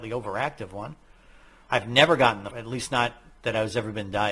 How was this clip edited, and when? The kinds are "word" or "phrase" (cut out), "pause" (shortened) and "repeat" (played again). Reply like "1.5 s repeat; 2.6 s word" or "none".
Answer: 2.5 s word